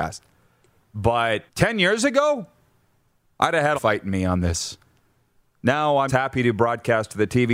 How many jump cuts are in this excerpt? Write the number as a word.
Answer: three